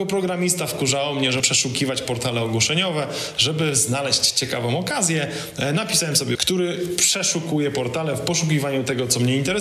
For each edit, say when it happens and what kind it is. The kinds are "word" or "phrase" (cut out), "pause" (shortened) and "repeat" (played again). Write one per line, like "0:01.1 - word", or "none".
0:01.4 - word
0:06.3 - word